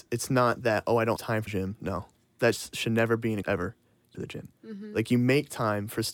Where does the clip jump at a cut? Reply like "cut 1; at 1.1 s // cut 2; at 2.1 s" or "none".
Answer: cut 1; at 1.2 s // cut 2; at 1.5 s // cut 3; at 2.4 s // cut 4; at 3.4 s // cut 5; at 4.1 s // cut 6; at 4.5 s